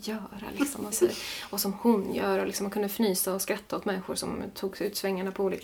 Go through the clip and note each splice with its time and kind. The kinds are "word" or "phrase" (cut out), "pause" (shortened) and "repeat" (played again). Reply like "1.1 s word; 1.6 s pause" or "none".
0.9 s word